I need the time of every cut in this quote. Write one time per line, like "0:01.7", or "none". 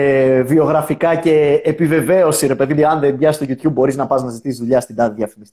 0:02.8

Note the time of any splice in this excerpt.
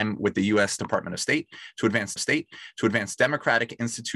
0:02.2

